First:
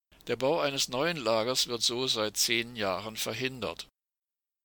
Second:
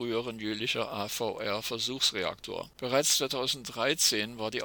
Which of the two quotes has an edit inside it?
second; 1 cut; at 2.7 s

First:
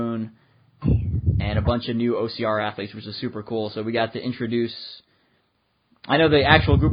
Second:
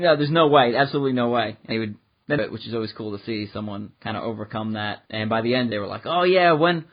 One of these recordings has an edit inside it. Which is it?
second; 5 cuts; at 1.7 s, 2.4 s, 3.9 s, 5.1 s, 5.7 s

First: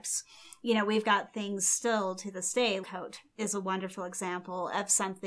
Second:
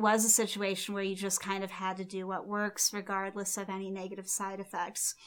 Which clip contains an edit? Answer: first; 1 cut; at 2.8 s

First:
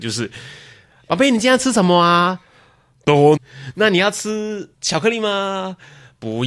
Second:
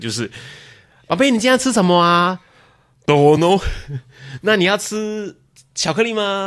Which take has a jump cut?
first; 2 cuts; at 3.4 s, 4.7 s

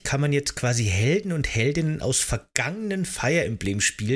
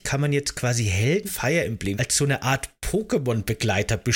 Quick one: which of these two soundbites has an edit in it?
second; 2 cuts; at 1.3 s, 1.9 s

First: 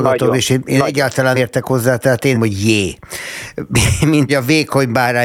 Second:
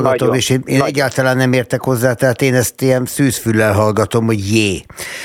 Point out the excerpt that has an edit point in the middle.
first; 3 cuts; at 1.3 s, 2.3 s, 4.3 s

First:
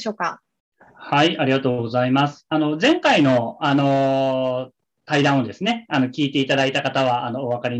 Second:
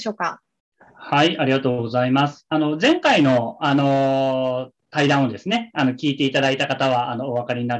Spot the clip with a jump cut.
second; 1 cut; at 4.8 s

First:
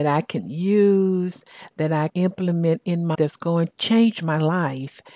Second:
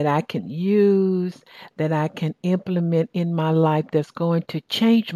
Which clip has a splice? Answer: first; 3 cuts; at 2.1 s, 3.1 s, 3.7 s

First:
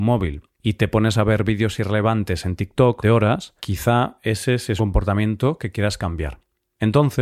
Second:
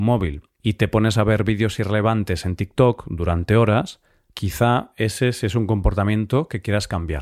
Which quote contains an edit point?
first; 3 cuts; at 3.0 s, 3.6 s, 4.8 s

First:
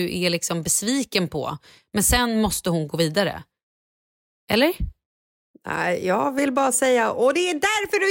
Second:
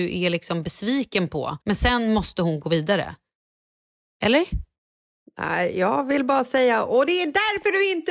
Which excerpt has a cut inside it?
second; 1 cut; at 1.6 s

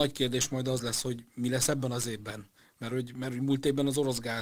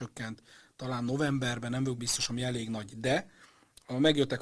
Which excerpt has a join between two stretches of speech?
second; 1 cut; at 2.0 s

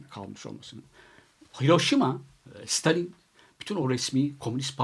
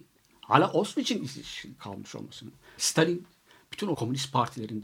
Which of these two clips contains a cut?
second; 3 cuts; at 1.8 s, 2.8 s, 3.9 s

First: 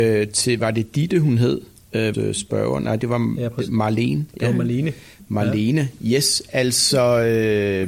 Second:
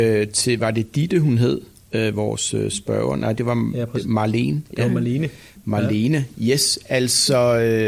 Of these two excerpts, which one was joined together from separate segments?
first; 1 cut; at 2.1 s

